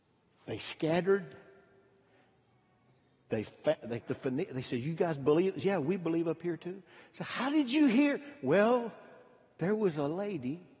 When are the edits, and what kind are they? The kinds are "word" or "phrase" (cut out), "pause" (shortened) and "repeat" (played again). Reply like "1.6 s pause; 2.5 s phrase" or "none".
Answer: 4.0 s word

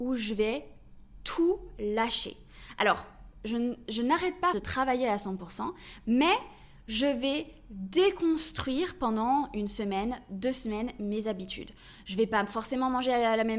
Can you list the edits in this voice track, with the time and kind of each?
4.5 s word

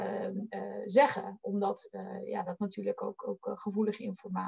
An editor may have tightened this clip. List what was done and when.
none

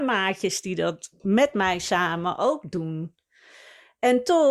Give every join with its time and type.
none

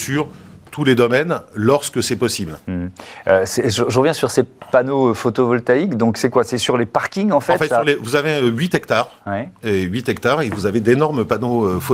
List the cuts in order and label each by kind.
none

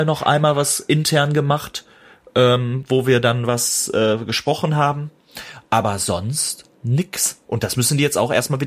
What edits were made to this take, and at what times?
none

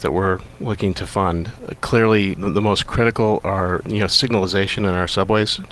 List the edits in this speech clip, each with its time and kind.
2.3 s word; 3.8 s word

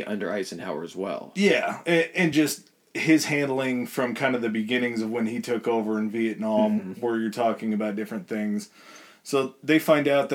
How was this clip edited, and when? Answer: none

